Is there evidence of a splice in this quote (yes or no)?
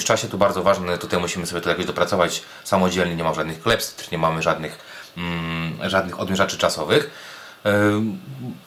no